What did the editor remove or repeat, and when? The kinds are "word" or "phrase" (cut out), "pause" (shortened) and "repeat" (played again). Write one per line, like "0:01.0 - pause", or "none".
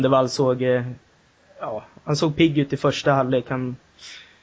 none